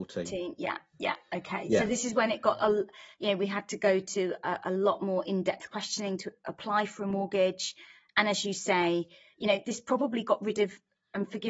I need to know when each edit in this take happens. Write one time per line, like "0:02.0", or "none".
none